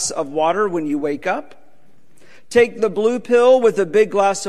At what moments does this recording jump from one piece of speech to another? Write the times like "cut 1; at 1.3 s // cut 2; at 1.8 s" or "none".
none